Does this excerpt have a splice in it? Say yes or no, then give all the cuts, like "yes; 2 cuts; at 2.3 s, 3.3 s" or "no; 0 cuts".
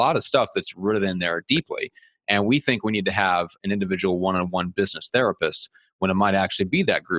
no; 0 cuts